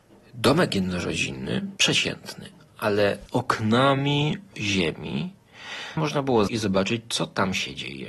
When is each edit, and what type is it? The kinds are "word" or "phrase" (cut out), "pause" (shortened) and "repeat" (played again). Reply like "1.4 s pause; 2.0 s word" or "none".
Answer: 1.8 s word; 3.3 s word; 4.5 s word; 6.0 s phrase; 6.5 s word